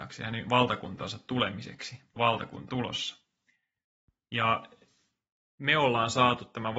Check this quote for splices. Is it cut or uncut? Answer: cut